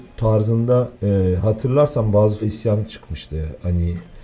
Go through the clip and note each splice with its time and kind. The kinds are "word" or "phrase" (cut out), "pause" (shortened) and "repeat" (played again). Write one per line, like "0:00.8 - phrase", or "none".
0:00.9 - pause
0:02.4 - word

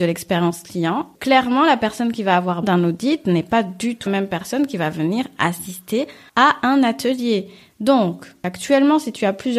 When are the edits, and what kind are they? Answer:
0:02.6 - word
0:04.1 - word

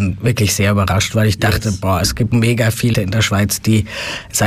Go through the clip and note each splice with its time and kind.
0:02.3 - word
0:02.9 - word

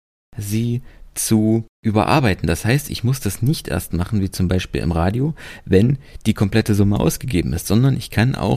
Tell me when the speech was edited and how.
0:01.7 - pause

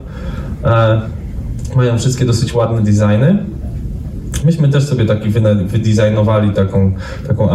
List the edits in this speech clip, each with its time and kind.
none

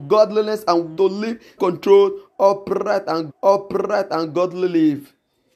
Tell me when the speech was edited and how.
0:01.0 - phrase
0:01.6 - word
0:03.3 - repeat

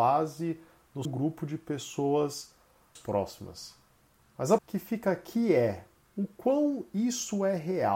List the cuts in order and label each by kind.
0:01.0 - word
0:03.0 - word
0:04.6 - word

